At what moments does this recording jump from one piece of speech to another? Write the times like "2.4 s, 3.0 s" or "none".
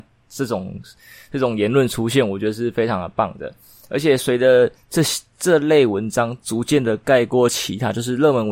none